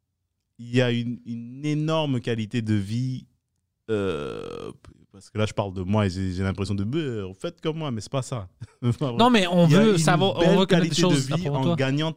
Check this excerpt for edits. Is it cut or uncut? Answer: cut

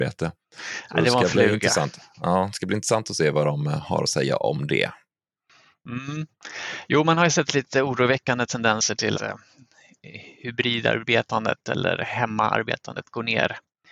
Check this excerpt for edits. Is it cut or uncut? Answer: cut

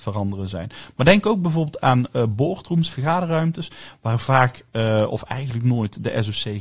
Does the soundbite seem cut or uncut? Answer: uncut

